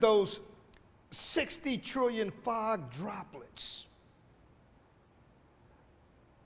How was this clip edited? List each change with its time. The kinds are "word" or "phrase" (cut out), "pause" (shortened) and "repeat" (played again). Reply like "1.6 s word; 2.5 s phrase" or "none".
none